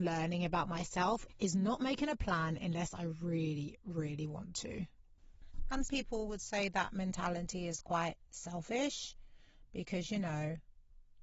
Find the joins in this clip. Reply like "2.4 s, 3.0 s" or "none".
5.9 s